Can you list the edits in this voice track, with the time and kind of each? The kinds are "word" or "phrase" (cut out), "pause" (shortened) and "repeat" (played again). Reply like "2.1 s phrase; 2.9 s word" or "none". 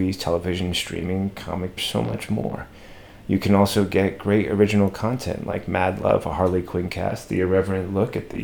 1.8 s phrase